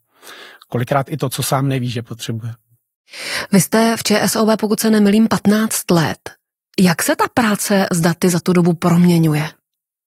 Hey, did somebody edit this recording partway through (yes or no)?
no